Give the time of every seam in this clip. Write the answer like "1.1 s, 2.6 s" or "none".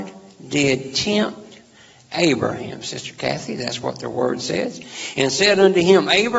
none